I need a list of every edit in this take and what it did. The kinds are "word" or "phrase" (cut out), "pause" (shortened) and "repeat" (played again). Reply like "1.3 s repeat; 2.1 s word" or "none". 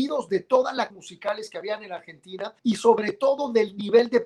0.9 s phrase; 2.6 s pause